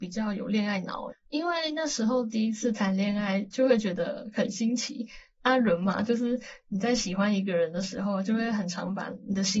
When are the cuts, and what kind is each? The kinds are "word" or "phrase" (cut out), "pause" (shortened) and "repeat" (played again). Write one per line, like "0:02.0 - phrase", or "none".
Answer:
0:01.1 - word